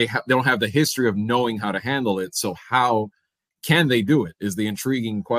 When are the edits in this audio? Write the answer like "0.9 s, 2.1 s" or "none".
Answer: none